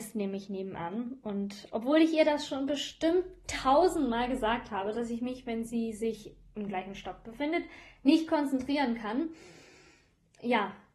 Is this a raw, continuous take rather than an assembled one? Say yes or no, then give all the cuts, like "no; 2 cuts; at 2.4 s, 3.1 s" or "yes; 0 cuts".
yes; 0 cuts